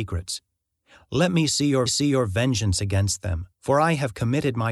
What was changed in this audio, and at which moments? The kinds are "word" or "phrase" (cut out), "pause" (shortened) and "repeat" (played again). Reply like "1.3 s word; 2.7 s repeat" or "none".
1.9 s repeat; 3.5 s pause

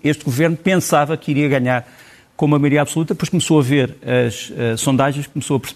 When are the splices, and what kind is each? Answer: none

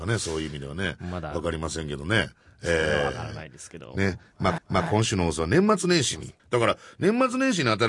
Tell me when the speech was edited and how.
4.6 s repeat; 6.4 s pause

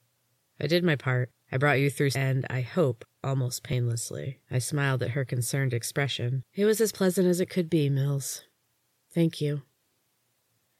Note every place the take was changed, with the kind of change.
1.4 s pause; 2.1 s word; 3.1 s pause; 4.4 s pause; 6.5 s pause

